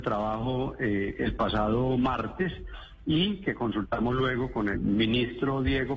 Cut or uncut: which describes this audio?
cut